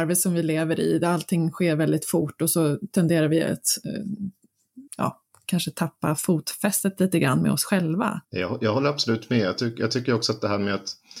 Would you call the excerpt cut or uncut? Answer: cut